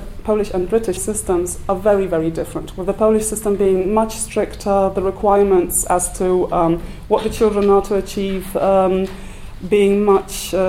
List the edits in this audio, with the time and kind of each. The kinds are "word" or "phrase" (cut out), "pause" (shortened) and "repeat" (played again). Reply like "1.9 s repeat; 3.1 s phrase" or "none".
1.0 s word